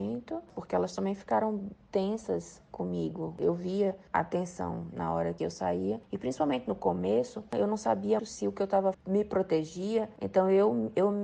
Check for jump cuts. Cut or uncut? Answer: cut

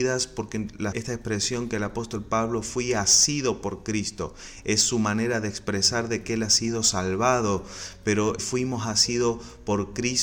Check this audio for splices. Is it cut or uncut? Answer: cut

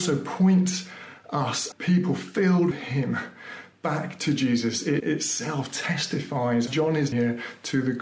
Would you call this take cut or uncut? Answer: cut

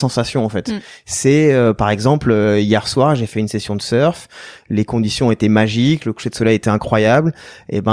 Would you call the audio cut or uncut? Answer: uncut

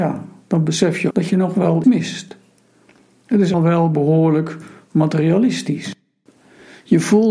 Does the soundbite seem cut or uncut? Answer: cut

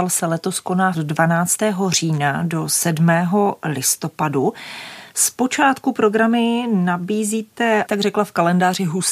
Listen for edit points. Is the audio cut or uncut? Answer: cut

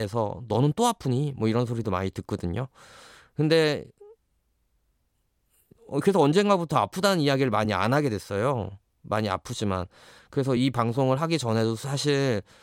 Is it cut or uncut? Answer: uncut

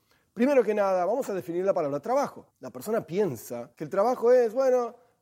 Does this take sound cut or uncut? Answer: cut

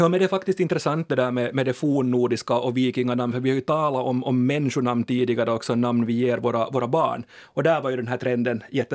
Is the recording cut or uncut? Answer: uncut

